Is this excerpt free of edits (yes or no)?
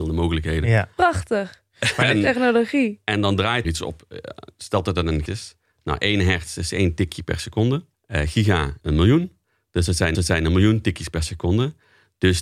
no